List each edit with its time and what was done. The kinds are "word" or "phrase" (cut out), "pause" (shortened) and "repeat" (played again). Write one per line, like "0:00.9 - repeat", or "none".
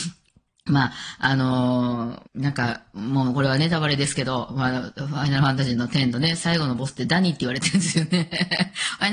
0:02.3 - pause